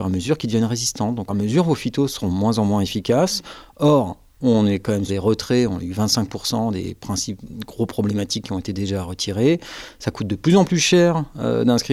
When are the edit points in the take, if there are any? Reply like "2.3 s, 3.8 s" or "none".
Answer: 1.3 s, 5.1 s